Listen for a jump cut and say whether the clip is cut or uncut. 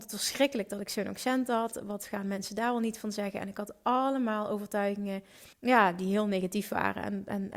cut